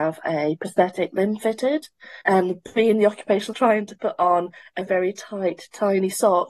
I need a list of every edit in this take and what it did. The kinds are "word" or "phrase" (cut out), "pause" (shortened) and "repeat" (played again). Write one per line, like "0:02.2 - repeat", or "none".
0:02.2 - pause
0:03.5 - word
0:04.9 - word

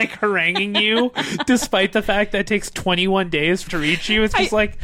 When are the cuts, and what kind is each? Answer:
0:03.7 - phrase

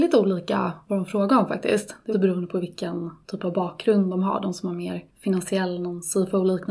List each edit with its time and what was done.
0:02.1 - word
0:05.1 - pause

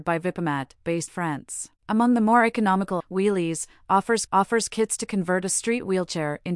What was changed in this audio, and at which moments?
0:01.1 - word
0:01.8 - pause
0:03.0 - word
0:04.3 - repeat

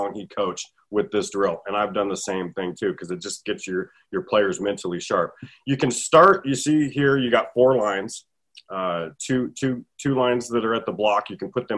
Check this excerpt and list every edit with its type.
none

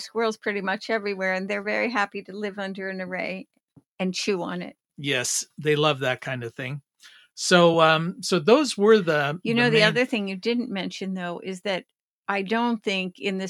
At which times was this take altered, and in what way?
none

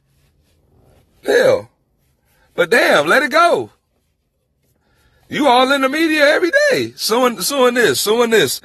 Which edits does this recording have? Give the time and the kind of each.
none

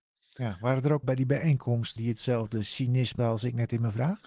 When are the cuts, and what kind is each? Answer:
0:01.0 - phrase
0:02.0 - word
0:03.2 - phrase

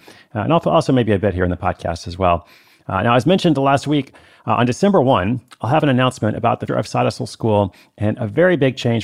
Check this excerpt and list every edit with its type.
0:06.7 - word

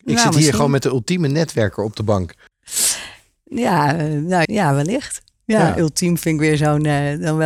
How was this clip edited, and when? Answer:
0:04.4 - word

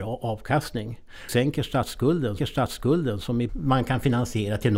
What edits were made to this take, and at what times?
0:01.3 - word
0:02.4 - repeat
0:03.5 - word

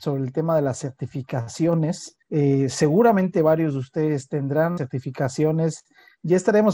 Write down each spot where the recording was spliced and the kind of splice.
0:02.2 - pause
0:04.8 - word

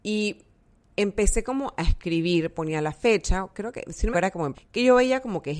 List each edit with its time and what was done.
0:04.1 - phrase
0:04.5 - word

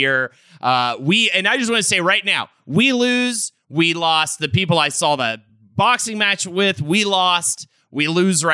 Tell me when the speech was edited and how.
none

